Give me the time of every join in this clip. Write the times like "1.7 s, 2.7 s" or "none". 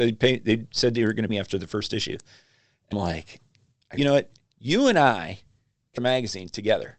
1.3 s, 2.9 s, 4.0 s, 6.0 s